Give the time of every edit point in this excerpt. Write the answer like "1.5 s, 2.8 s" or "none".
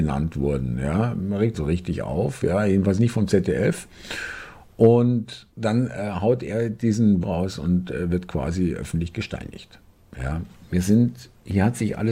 1.5 s, 5.5 s, 7.2 s